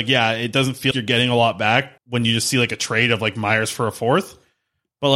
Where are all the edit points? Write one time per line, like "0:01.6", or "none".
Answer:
0:00.9
0:02.0